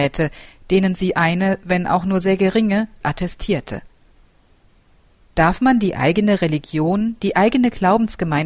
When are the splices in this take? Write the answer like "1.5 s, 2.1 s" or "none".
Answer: 3.0 s